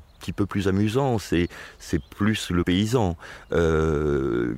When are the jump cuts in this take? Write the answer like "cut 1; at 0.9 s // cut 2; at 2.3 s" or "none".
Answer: cut 1; at 2.6 s